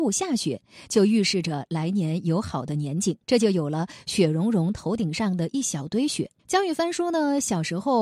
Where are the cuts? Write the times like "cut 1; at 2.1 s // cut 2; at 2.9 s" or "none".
cut 1; at 3.2 s // cut 2; at 6.4 s